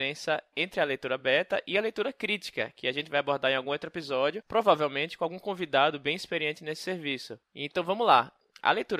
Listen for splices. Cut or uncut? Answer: uncut